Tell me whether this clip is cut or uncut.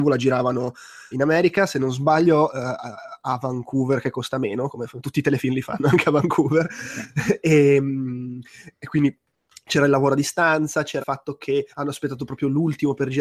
cut